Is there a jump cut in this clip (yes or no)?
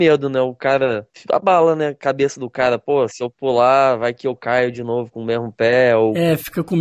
no